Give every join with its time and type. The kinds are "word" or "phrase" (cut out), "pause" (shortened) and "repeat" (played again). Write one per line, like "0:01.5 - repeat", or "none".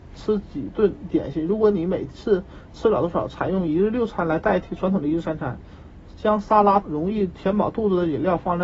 0:06.8 - word